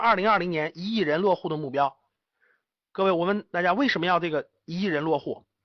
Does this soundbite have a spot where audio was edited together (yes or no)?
no